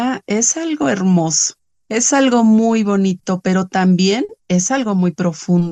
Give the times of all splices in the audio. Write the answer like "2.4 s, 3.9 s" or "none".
1.7 s

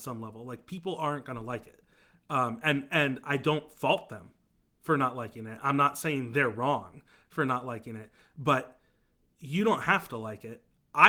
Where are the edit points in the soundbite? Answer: none

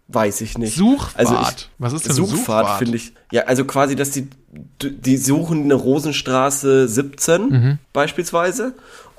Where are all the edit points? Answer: 1.7 s, 3.2 s, 7.8 s

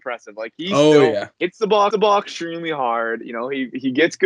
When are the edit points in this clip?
1.3 s, 1.9 s

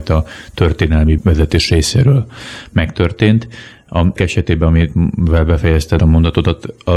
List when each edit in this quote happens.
1.2 s, 4.2 s, 6.0 s

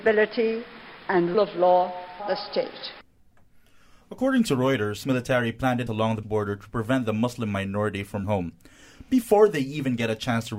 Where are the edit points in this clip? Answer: 1.3 s, 2.2 s, 5.0 s, 5.9 s, 6.2 s, 8.2 s

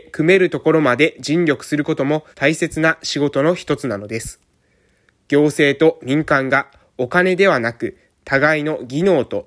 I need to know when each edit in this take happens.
2.3 s

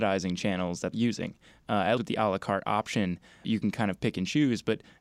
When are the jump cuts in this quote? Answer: 0.9 s, 2.0 s, 3.4 s

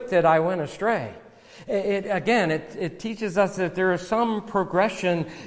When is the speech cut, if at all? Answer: none

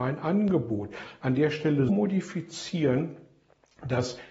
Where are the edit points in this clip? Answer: 1.9 s

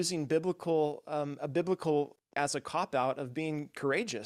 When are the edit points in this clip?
1.4 s, 2.4 s

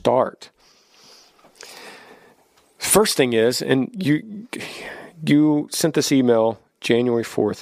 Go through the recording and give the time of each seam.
none

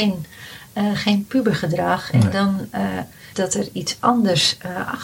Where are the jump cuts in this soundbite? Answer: 3.3 s

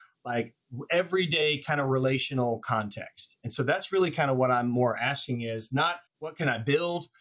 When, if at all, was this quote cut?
6.1 s

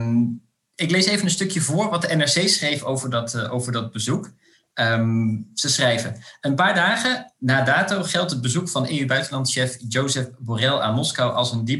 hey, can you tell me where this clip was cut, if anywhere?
none

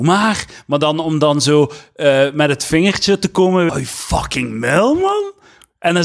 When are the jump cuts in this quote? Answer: 3.7 s

